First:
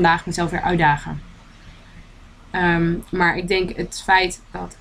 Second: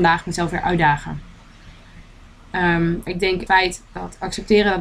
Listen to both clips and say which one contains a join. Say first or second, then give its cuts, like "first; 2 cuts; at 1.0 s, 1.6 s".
second; 2 cuts; at 3.1 s, 3.5 s